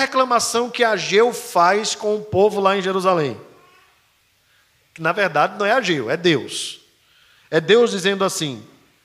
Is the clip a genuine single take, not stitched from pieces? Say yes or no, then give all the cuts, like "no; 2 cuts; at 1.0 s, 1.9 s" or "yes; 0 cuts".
yes; 0 cuts